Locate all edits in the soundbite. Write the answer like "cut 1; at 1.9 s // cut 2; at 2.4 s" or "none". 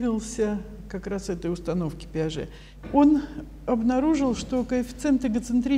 none